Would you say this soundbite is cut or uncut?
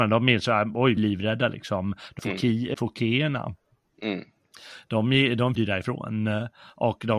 cut